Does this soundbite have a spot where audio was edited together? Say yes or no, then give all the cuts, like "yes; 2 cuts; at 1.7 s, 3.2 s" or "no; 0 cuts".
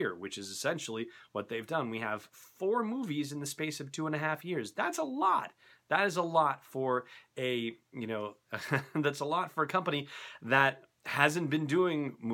no; 0 cuts